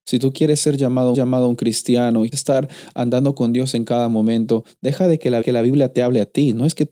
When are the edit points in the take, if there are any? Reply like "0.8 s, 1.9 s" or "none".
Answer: 1.1 s, 2.3 s, 5.4 s